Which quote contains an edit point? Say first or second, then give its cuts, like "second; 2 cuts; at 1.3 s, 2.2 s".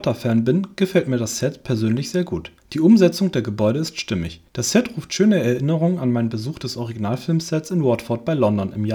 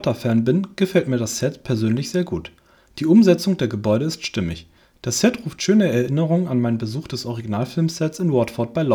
first; 2 cuts; at 2.6 s, 4.5 s